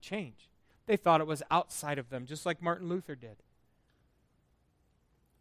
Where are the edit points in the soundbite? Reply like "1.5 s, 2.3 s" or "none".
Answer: none